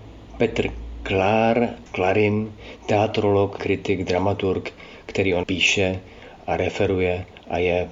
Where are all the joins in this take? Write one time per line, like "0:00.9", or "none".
0:01.9
0:03.6
0:05.4